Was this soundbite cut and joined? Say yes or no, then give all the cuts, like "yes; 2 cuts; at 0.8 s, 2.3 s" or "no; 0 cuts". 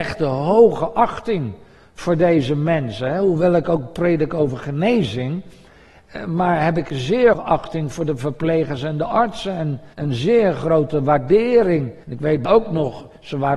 yes; 4 cuts; at 7.3 s, 9.9 s, 12.0 s, 12.4 s